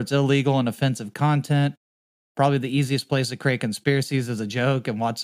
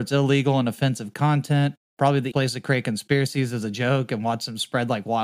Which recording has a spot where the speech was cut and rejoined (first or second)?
second